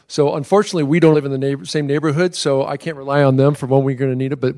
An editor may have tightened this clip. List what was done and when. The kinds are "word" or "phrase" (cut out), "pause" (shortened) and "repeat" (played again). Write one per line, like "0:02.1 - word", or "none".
0:01.1 - word